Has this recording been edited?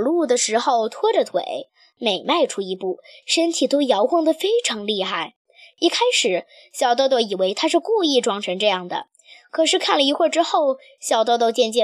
no; 0 cuts

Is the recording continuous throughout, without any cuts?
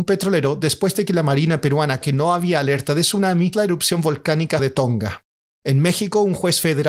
no; 3 cuts; at 2.0 s, 3.5 s, 4.6 s

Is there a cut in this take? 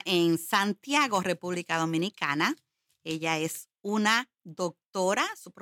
no; 0 cuts

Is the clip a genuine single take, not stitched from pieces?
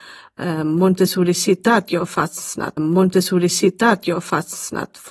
no; 1 cut; at 2.8 s

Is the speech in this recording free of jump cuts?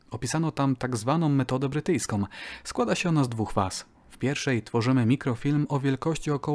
yes; 0 cuts

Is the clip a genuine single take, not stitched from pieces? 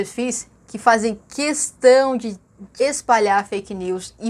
no; 1 cut; at 2.7 s

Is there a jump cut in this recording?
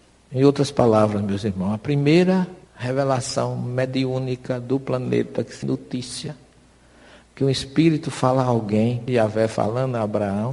yes; 3 cuts; at 2.6 s, 5.6 s, 9.1 s

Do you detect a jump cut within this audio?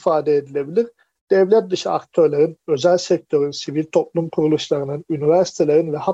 no; 0 cuts

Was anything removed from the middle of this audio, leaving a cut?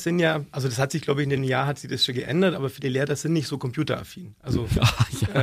yes; 1 cut; at 1.4 s

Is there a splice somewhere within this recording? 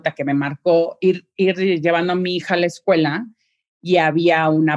no; 0 cuts

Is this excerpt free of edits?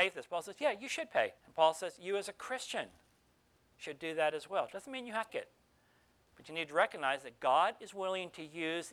no; 2 cuts; at 1.4 s, 5.3 s

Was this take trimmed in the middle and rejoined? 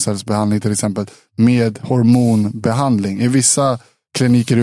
no; 0 cuts

